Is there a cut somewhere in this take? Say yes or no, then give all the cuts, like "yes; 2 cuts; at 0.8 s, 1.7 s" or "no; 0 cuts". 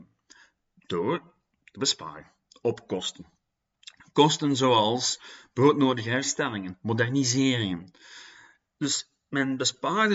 no; 0 cuts